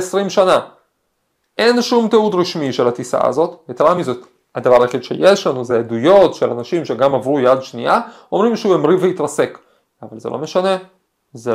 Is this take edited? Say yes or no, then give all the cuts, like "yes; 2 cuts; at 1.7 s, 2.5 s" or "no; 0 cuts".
no; 0 cuts